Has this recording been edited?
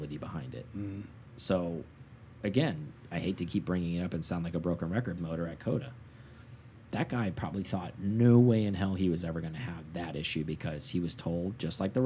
yes; 1 cut; at 5.2 s

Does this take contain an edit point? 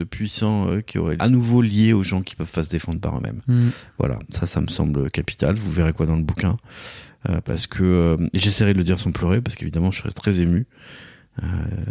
yes; 1 cut; at 1.2 s

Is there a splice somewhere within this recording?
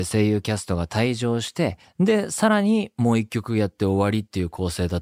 yes; 1 cut; at 1.8 s

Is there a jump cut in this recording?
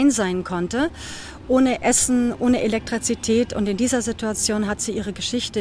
no; 0 cuts

